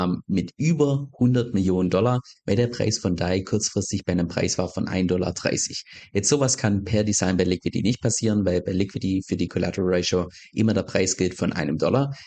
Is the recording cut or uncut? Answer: uncut